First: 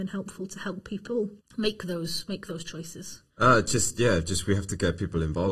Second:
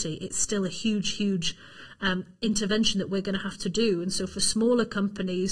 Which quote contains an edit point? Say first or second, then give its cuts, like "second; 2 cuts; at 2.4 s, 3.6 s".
first; 2 cuts; at 1.4 s, 3.3 s